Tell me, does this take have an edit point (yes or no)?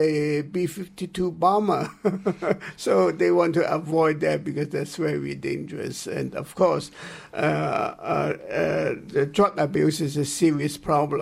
no